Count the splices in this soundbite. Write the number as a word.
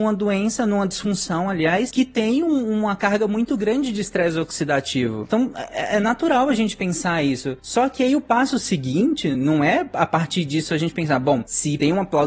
zero